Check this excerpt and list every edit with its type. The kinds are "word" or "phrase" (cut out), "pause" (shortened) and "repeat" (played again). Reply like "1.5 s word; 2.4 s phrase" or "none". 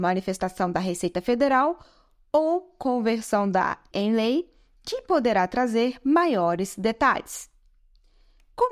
3.9 s word

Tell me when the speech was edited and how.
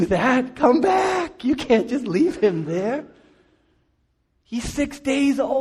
none

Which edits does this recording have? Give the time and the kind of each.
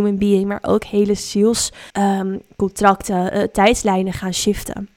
1.9 s pause

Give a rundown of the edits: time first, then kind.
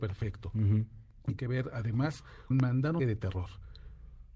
1.4 s word; 2.5 s word; 3.0 s word

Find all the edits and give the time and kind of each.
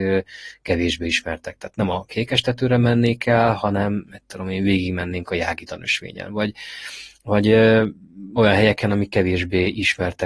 none

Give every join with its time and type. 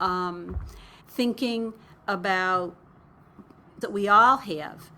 1.0 s pause; 3.8 s word

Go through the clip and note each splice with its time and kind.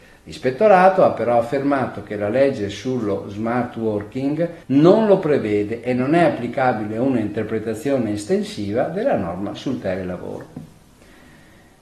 4.6 s pause

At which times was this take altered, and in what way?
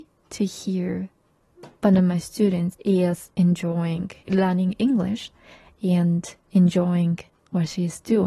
none

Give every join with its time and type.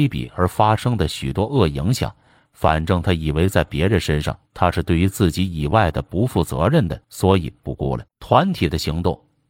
4.5 s pause; 7.0 s pause; 8.1 s pause

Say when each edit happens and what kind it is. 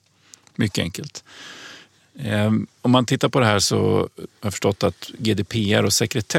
4.3 s pause

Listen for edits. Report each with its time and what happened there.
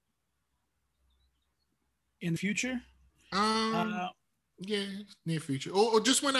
2.4 s word; 3.1 s pause

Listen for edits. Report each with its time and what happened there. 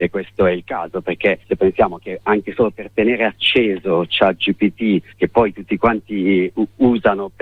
1.4 s pause; 5.1 s pause

